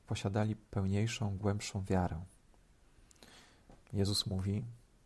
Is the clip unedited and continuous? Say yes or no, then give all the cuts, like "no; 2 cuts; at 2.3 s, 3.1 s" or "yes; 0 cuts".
no; 1 cut; at 3.8 s